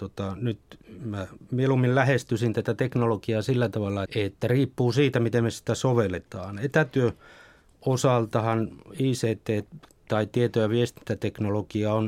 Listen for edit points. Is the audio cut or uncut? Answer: cut